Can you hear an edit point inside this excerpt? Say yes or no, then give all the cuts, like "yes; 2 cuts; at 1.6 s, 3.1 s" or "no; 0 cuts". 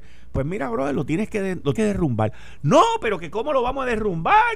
yes; 1 cut; at 1.8 s